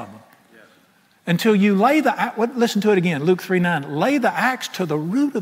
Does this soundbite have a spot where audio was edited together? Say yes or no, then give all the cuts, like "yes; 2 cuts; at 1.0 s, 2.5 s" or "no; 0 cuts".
no; 0 cuts